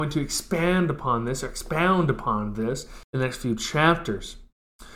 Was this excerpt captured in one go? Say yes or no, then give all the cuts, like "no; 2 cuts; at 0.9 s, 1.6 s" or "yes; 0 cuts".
no; 1 cut; at 3.0 s